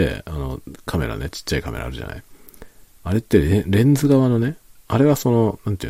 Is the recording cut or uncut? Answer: cut